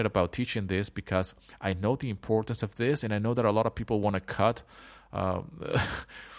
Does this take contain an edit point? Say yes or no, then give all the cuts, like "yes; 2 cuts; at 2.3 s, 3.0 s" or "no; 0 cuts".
no; 0 cuts